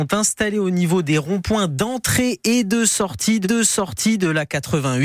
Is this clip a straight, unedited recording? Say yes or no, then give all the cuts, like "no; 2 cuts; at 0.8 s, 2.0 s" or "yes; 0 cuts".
no; 1 cut; at 3.4 s